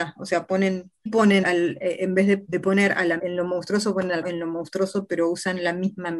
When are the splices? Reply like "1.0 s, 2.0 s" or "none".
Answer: 1.1 s, 1.4 s, 2.5 s, 3.2 s, 4.2 s